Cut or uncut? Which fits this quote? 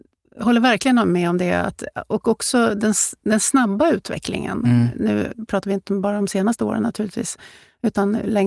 uncut